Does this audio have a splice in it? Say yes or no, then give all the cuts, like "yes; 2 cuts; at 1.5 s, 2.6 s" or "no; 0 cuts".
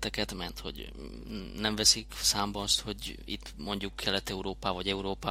no; 0 cuts